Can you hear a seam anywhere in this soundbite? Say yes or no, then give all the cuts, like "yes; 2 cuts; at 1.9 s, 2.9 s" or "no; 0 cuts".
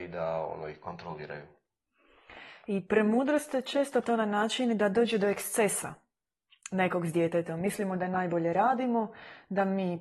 yes; 1 cut; at 4.0 s